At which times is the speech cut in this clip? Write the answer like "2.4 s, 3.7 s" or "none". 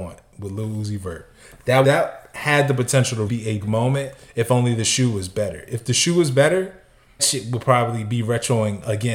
1.8 s, 3.3 s, 3.6 s, 7.2 s